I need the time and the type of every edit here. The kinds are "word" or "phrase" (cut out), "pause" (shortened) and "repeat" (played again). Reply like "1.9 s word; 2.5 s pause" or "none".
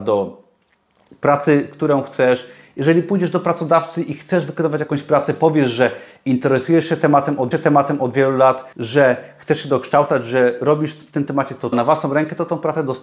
7.5 s repeat; 8.7 s pause; 11.7 s word